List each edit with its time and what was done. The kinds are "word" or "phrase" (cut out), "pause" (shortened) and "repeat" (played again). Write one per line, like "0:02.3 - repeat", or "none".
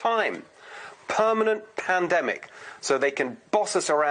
none